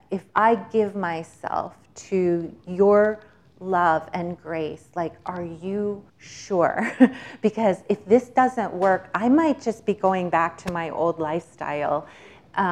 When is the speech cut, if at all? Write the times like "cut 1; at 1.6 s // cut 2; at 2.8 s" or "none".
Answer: cut 1; at 6.1 s